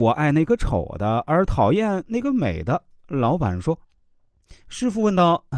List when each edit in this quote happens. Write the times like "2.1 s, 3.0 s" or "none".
3.8 s